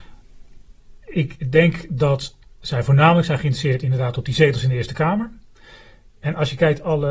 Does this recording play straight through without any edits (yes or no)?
yes